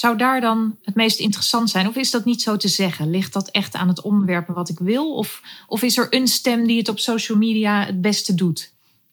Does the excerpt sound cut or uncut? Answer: uncut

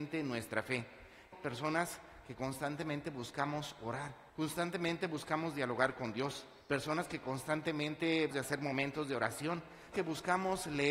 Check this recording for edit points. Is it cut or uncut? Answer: cut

